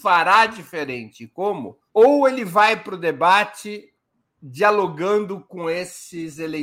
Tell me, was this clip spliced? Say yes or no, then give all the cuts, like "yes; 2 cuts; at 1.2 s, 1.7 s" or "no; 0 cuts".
yes; 1 cut; at 1.9 s